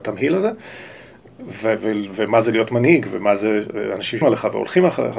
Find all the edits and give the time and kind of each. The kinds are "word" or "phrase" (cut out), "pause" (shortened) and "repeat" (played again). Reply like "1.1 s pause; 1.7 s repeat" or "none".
4.2 s word